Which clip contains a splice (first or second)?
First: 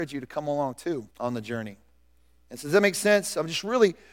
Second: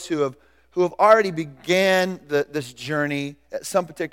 first